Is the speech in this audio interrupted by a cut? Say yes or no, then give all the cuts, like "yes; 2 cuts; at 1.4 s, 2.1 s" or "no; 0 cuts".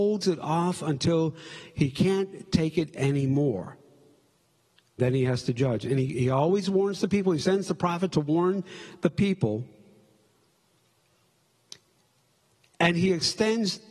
yes; 1 cut; at 5.0 s